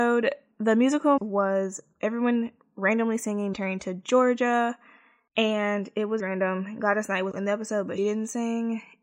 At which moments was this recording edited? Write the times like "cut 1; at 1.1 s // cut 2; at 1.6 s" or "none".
cut 1; at 1.2 s // cut 2; at 3.5 s // cut 3; at 6.2 s // cut 4; at 7.3 s // cut 5; at 8.0 s